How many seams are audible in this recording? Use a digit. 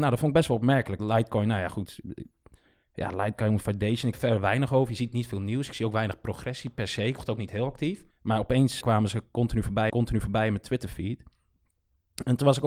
6